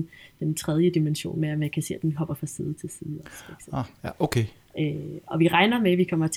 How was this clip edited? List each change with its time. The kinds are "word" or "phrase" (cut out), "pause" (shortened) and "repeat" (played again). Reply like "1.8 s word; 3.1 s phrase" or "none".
none